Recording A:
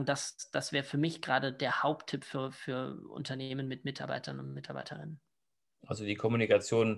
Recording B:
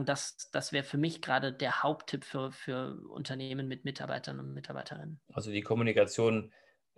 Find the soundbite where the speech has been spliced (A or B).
B